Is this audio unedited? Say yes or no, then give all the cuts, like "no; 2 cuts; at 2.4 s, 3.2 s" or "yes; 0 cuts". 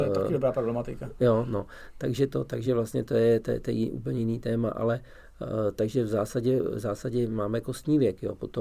yes; 0 cuts